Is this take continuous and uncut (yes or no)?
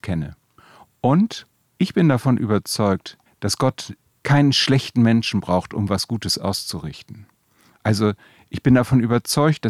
yes